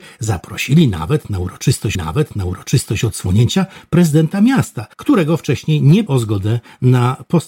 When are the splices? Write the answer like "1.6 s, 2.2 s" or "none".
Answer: 2.0 s, 4.9 s, 6.1 s